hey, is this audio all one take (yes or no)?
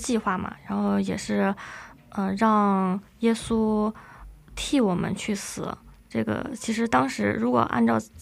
yes